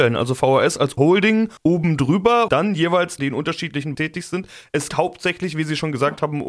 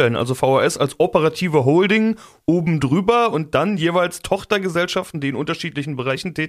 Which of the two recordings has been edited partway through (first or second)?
first